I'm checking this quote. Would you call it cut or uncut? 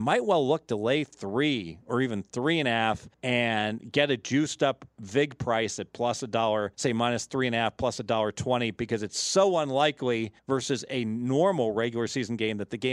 cut